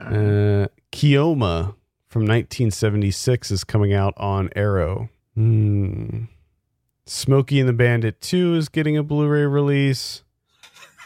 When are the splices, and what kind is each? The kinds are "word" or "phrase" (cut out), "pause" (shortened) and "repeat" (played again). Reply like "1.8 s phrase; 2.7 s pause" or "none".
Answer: 5.2 s pause